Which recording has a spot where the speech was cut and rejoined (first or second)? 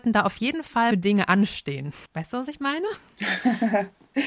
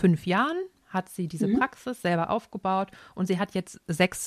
first